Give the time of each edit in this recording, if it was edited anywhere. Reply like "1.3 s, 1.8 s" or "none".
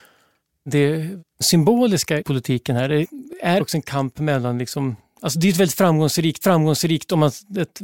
2.2 s, 3.6 s, 6.4 s